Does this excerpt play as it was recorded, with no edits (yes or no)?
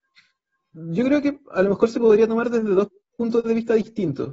yes